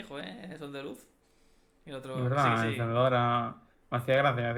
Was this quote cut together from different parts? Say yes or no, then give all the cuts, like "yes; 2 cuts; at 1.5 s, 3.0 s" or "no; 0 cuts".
no; 0 cuts